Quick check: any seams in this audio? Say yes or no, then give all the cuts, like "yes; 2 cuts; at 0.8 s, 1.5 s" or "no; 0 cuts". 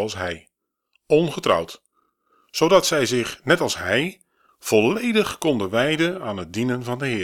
no; 0 cuts